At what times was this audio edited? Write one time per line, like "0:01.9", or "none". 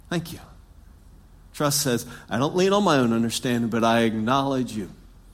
none